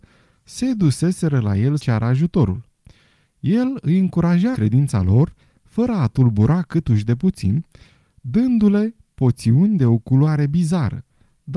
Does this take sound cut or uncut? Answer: cut